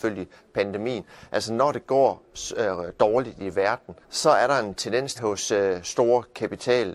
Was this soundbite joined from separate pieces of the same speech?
yes; 2 cuts; at 4.0 s, 5.1 s

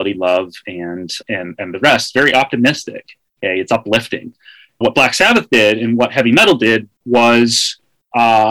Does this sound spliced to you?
yes; 3 cuts; at 1.2 s, 4.8 s, 7.0 s

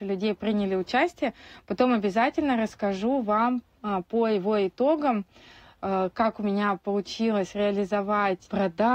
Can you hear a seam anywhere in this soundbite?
no; 0 cuts

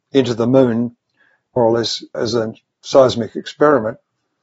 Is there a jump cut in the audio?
yes; 2 cuts; at 1.6 s, 2.1 s

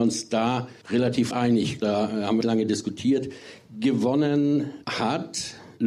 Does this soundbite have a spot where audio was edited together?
yes; 2 cuts; at 1.3 s, 2.4 s

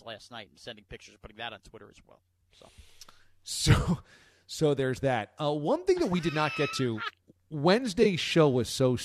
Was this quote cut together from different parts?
no; 0 cuts

